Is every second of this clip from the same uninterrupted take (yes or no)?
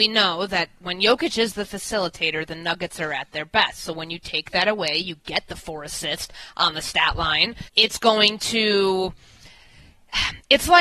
no